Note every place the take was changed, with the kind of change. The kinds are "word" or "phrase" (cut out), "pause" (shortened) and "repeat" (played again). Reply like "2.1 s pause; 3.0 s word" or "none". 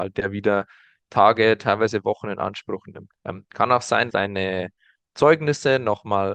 3.2 s pause; 4.1 s word